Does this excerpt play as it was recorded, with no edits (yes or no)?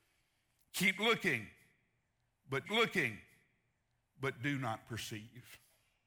no